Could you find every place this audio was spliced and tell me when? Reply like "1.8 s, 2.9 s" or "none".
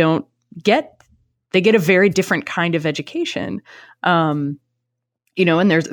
none